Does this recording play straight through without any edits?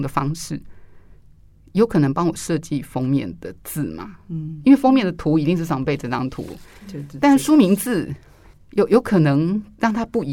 no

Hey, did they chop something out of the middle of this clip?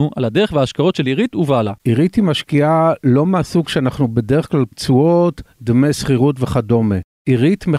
yes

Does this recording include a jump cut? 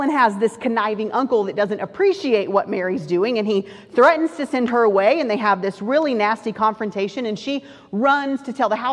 no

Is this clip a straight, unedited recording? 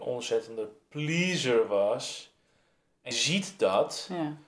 no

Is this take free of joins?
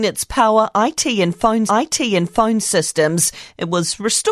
no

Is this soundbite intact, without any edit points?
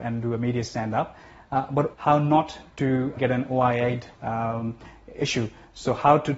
no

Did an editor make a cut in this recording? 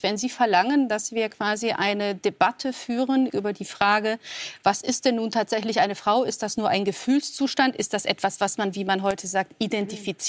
yes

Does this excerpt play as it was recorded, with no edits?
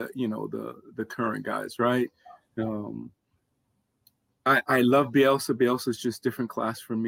yes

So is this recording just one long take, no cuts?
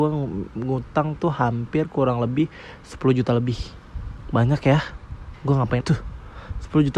no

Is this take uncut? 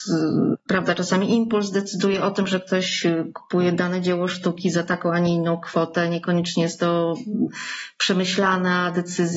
yes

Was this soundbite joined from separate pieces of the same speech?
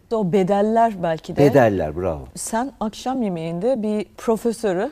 no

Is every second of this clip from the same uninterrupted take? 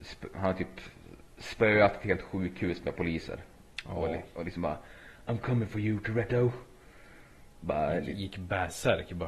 yes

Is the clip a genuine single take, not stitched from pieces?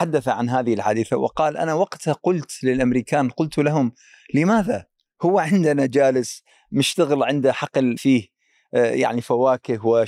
no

